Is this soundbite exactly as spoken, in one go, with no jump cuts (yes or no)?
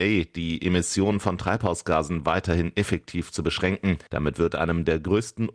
no